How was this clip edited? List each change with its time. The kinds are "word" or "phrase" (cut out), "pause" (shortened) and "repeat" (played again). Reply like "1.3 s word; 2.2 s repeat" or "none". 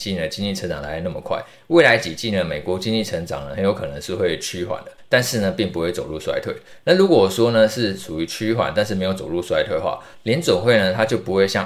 none